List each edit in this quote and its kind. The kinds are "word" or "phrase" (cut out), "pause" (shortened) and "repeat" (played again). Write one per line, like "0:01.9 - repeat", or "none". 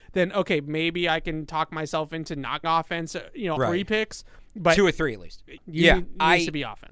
0:02.6 - word
0:03.6 - word
0:05.6 - word